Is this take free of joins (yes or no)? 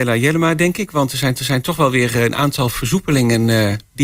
no